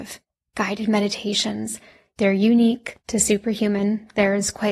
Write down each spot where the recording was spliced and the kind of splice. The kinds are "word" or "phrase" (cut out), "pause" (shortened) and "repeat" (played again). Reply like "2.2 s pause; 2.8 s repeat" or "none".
none